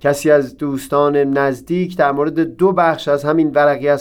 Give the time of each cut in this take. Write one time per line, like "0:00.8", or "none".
none